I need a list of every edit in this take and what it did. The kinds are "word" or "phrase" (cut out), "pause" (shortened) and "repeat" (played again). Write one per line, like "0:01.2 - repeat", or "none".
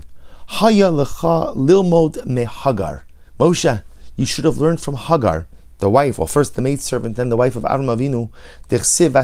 0:03.3 - pause